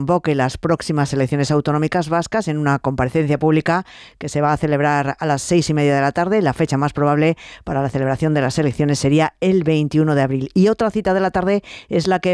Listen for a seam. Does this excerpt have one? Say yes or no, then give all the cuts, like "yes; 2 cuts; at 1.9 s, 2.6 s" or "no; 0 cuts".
no; 0 cuts